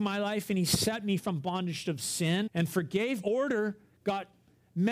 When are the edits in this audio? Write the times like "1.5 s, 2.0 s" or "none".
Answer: 1.2 s, 2.5 s, 3.2 s